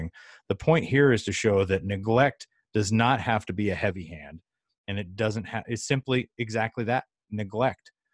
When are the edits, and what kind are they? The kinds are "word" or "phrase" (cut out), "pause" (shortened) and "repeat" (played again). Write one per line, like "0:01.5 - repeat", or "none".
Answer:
none